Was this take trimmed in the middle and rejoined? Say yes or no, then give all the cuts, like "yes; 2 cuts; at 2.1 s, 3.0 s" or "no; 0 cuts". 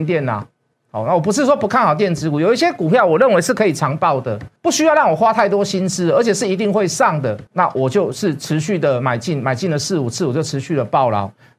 yes; 2 cuts; at 4.6 s, 7.5 s